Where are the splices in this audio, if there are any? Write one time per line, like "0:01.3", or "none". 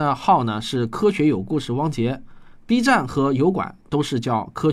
none